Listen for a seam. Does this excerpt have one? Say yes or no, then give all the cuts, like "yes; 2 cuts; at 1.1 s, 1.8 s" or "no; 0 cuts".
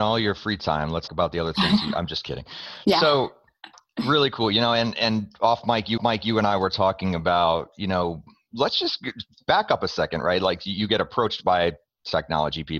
yes; 2 cuts; at 1.1 s, 6.0 s